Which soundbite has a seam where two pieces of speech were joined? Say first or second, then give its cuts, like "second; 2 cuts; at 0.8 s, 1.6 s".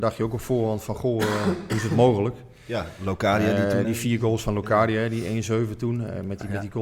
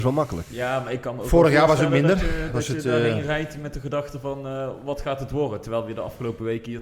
first; 1 cut; at 3.8 s